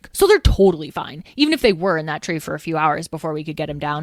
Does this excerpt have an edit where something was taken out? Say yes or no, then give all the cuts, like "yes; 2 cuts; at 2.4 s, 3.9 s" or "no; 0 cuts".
no; 0 cuts